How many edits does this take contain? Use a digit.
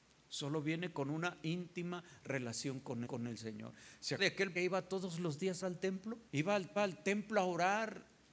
6